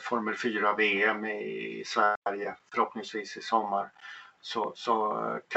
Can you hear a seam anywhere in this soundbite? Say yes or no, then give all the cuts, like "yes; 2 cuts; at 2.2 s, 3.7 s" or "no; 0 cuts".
no; 0 cuts